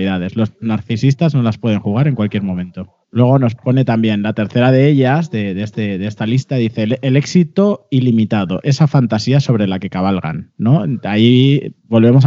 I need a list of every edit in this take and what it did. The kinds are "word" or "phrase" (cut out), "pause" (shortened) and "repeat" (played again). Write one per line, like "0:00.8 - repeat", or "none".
0:03.0 - pause
0:05.7 - repeat